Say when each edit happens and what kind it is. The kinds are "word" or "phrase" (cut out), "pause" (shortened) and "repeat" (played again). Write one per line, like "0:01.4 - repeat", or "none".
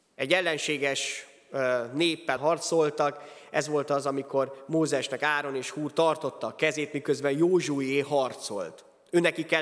0:02.4 - word